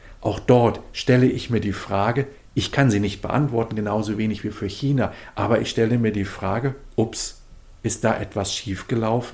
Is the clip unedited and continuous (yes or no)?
yes